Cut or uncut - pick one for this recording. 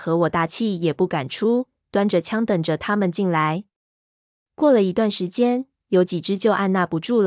uncut